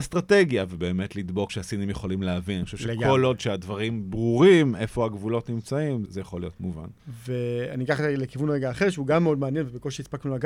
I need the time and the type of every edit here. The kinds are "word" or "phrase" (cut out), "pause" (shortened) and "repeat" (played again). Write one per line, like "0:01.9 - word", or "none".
0:01.5 - phrase
0:06.1 - word
0:07.0 - pause